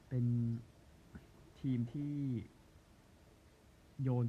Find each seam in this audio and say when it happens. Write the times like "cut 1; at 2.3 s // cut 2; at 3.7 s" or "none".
none